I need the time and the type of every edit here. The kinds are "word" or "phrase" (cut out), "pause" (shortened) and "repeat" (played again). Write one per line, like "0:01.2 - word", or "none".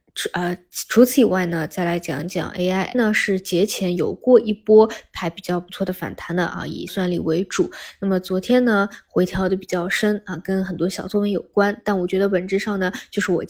0:02.9 - word
0:06.9 - word